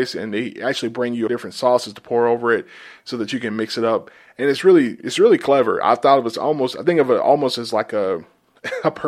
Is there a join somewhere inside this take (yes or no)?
yes